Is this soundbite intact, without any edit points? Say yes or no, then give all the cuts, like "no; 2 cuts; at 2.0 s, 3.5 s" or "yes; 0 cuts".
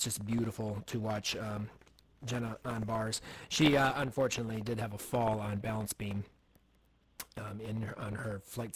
yes; 0 cuts